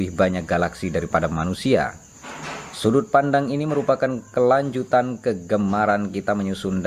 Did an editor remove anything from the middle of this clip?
no; 0 cuts

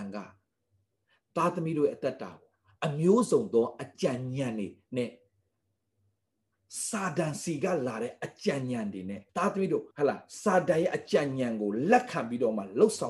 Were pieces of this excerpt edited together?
yes; 2 cuts; at 9.3 s, 9.9 s

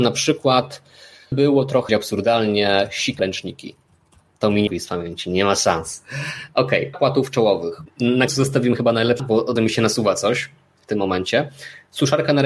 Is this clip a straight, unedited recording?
no; 8 cuts; at 1.3 s, 1.9 s, 3.2 s, 4.7 s, 6.9 s, 8.3 s, 9.2 s, 9.6 s

